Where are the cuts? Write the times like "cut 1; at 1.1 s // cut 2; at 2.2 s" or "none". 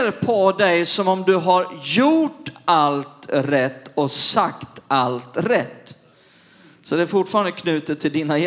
none

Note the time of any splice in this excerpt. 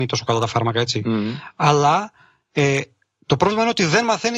none

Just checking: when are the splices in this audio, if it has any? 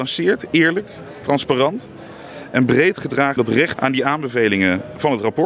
cut 1; at 3.4 s // cut 2; at 3.8 s

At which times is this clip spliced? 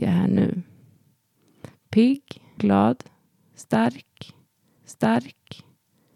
cut 1; at 2.6 s // cut 2; at 4.8 s

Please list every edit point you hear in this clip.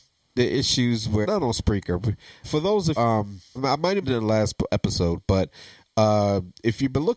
cut 1; at 1.2 s // cut 2; at 2.4 s // cut 3; at 3.0 s // cut 4; at 3.6 s // cut 5; at 4.0 s // cut 6; at 4.7 s

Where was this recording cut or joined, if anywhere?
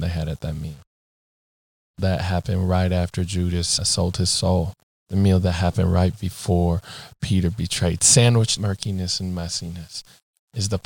cut 1; at 2.0 s // cut 2; at 3.8 s // cut 3; at 4.8 s // cut 4; at 8.6 s

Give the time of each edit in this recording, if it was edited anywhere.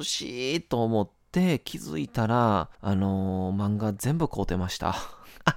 cut 1; at 1.2 s // cut 2; at 2.7 s

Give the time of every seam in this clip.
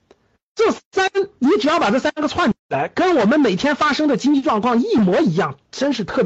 cut 1; at 2.6 s

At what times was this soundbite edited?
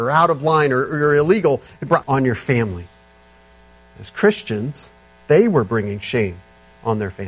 cut 1; at 2.0 s // cut 2; at 5.0 s

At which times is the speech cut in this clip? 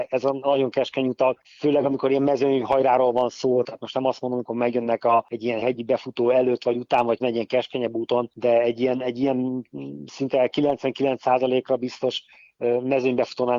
cut 1; at 5.6 s // cut 2; at 7.2 s

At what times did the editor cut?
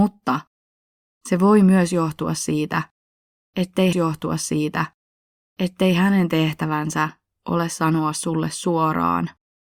cut 1; at 3.9 s

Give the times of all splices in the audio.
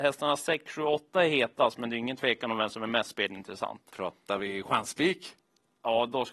none

